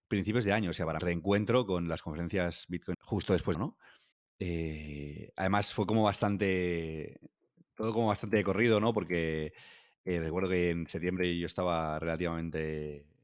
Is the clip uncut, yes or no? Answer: no